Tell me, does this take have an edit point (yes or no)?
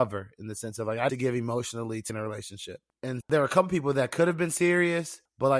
yes